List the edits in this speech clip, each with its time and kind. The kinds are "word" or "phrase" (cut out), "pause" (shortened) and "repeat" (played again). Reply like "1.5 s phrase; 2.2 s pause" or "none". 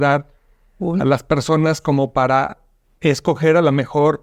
none